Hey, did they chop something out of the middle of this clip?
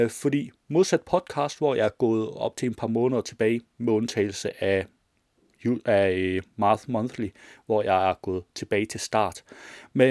no; 0 cuts

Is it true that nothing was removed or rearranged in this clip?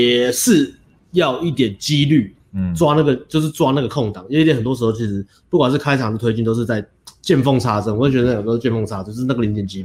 no; 2 cuts; at 1.0 s, 2.4 s

